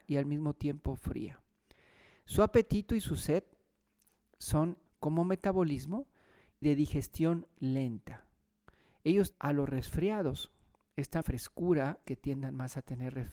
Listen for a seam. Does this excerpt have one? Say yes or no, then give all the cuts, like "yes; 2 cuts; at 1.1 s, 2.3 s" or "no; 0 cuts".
yes; 5 cuts; at 4.9 s, 6.6 s, 9.3 s, 11.2 s, 12.0 s